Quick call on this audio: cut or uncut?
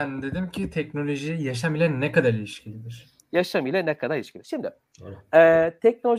uncut